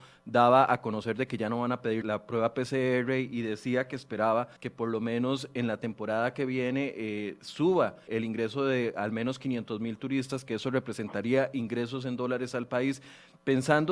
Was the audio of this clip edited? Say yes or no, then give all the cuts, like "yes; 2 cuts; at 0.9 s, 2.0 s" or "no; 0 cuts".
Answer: yes; 3 cuts; at 2.0 s, 4.6 s, 8.1 s